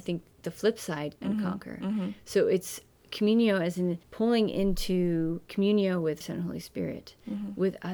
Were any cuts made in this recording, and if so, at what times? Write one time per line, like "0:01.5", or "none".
0:01.2
0:04.0
0:06.2